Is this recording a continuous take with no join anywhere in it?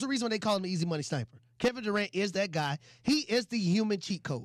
yes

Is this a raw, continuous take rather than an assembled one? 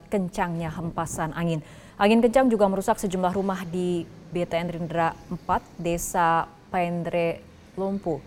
no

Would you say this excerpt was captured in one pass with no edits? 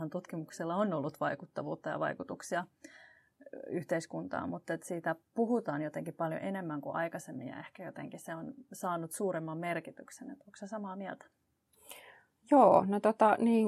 yes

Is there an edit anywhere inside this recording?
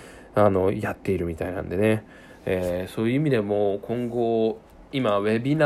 no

